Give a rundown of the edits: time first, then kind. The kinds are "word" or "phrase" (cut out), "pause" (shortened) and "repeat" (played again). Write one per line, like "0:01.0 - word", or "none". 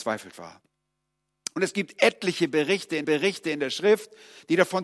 0:03.0 - repeat